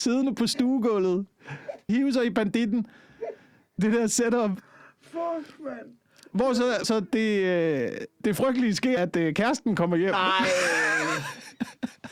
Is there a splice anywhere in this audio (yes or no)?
yes